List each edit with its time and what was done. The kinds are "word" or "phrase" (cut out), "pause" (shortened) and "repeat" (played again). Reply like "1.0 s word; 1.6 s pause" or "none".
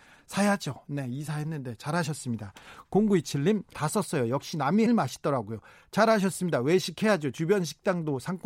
3.7 s word; 4.9 s phrase